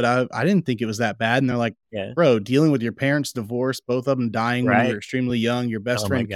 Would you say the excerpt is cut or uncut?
uncut